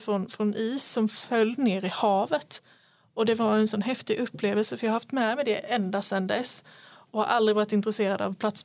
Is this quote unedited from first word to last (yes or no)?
yes